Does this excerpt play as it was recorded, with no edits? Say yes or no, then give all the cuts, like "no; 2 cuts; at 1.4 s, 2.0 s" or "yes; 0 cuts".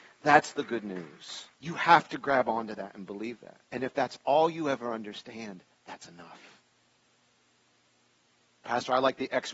no; 2 cuts; at 1.5 s, 3.6 s